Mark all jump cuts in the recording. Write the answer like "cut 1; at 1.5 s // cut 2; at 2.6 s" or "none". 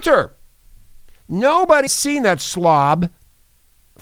cut 1; at 1.9 s